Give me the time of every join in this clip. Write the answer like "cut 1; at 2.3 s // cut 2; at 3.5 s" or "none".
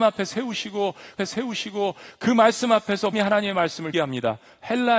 cut 1; at 1.2 s // cut 2; at 3.1 s // cut 3; at 3.9 s